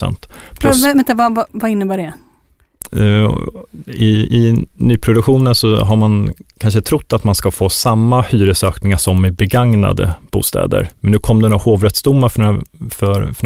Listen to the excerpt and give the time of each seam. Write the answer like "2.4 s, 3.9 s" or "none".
1.5 s